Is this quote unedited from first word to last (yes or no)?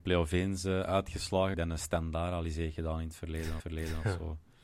no